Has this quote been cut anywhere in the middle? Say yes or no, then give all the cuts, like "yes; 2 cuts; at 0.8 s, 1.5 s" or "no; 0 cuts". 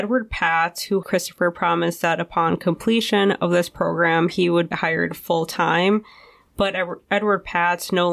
yes; 2 cuts; at 1.0 s, 4.7 s